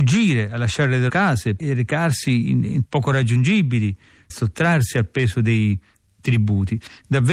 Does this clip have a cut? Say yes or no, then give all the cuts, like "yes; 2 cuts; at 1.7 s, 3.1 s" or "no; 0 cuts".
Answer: yes; 3 cuts; at 1.1 s, 2.8 s, 4.3 s